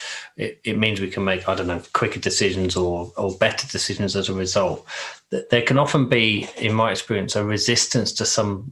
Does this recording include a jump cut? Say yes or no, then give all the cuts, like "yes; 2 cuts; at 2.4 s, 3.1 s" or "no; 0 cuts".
no; 0 cuts